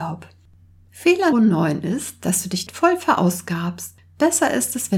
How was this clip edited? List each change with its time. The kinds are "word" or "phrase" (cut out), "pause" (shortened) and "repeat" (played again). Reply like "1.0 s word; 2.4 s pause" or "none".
1.3 s word; 2.7 s word